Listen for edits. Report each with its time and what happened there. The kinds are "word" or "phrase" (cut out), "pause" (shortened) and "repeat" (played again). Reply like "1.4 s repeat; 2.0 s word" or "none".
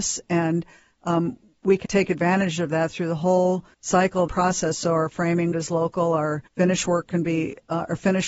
1.8 s word; 3.7 s pause; 4.3 s phrase; 5.5 s word; 6.5 s pause